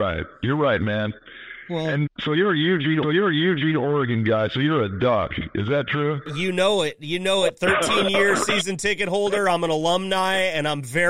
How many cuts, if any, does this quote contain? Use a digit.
2